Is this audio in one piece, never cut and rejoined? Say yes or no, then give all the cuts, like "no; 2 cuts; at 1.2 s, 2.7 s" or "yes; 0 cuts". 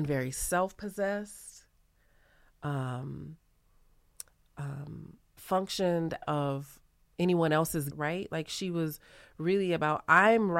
no; 4 cuts; at 5.4 s, 6.2 s, 7.1 s, 7.9 s